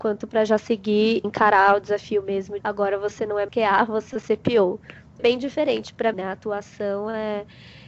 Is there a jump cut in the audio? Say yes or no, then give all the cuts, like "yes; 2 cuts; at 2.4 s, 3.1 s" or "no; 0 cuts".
yes; 6 cuts; at 1.2 s, 2.6 s, 3.5 s, 4.1 s, 5.2 s, 6.1 s